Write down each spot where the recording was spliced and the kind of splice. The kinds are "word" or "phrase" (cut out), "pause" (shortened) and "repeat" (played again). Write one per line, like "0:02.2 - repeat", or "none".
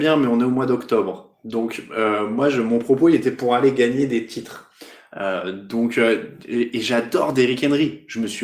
none